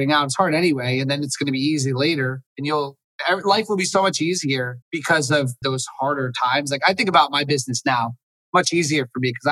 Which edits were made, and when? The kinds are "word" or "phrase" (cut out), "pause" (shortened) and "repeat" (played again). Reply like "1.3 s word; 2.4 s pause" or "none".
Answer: 2.5 s pause; 4.8 s pause; 5.6 s phrase